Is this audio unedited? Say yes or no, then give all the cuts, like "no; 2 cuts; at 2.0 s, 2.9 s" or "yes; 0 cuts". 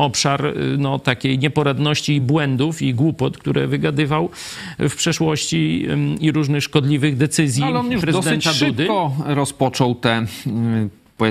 yes; 0 cuts